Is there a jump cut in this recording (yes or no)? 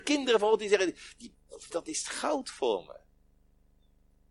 yes